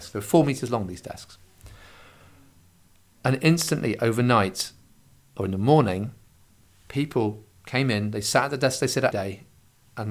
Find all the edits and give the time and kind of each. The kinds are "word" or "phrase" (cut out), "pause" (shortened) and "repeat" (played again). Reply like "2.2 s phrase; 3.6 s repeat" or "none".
9.1 s word